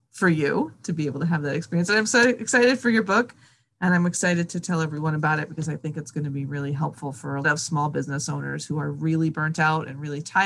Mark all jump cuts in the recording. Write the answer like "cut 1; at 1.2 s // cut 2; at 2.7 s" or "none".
cut 1; at 7.4 s